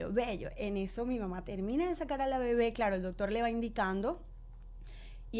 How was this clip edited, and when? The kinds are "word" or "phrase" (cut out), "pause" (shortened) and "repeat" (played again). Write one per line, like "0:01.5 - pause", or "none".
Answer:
none